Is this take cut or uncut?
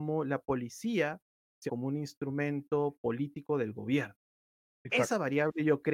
cut